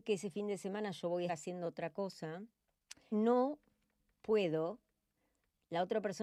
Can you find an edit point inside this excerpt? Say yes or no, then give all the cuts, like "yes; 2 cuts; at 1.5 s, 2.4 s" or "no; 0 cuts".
yes; 2 cuts; at 1.3 s, 3.1 s